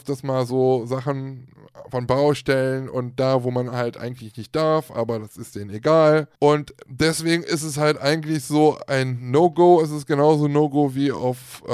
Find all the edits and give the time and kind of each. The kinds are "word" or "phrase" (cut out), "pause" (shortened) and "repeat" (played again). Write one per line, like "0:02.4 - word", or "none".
0:06.4 - pause